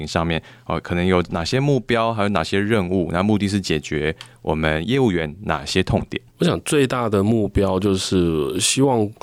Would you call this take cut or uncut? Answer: cut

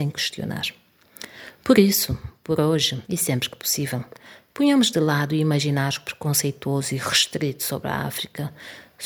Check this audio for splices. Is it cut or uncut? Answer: cut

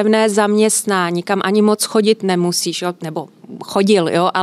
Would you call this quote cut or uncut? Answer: uncut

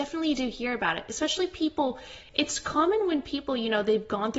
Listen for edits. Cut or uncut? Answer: uncut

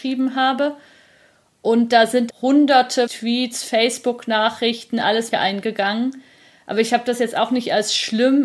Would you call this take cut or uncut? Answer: cut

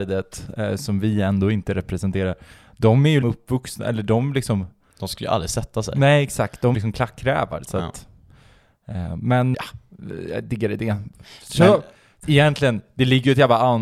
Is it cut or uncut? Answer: cut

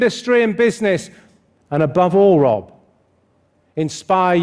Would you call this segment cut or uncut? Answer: uncut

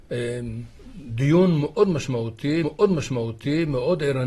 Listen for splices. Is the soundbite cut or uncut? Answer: cut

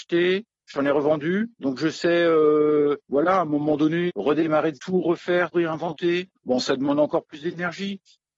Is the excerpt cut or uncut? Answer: cut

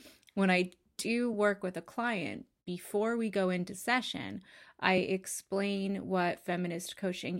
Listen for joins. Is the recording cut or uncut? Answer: uncut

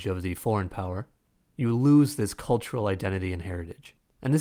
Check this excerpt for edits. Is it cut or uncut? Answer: uncut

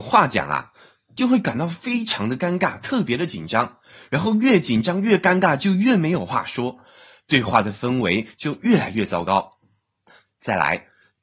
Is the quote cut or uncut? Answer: uncut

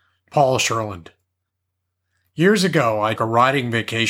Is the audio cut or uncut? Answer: cut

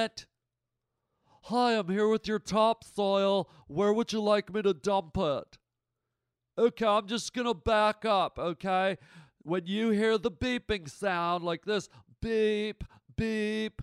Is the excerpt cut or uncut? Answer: uncut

